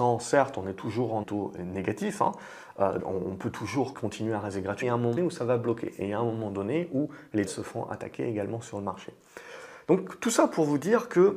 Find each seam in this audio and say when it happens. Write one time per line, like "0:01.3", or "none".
0:01.2
0:03.0
0:03.9
0:04.8
0:05.2
0:07.5